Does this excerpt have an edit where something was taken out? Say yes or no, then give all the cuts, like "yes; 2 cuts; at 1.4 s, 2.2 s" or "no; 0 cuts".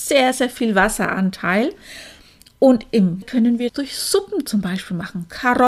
yes; 2 cuts; at 3.2 s, 3.7 s